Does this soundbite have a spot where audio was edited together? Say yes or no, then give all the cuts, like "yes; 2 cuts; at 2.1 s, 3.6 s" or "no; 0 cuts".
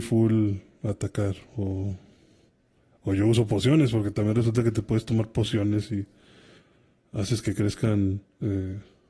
no; 0 cuts